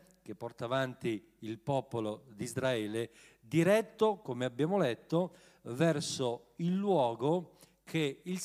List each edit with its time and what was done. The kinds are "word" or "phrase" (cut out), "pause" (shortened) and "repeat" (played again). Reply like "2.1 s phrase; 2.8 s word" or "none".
none